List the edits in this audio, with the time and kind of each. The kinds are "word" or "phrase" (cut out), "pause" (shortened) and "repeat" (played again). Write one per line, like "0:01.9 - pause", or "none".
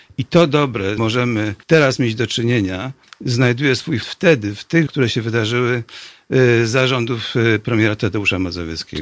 0:01.0 - phrase
0:01.6 - pause
0:03.0 - pause
0:04.0 - word
0:04.9 - word